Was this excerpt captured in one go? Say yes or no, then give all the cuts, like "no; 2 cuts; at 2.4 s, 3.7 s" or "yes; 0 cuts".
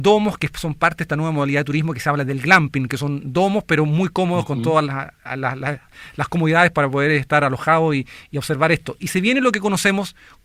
yes; 0 cuts